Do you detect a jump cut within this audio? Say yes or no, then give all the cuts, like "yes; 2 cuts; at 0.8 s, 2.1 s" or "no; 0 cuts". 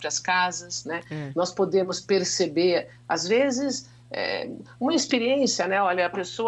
no; 0 cuts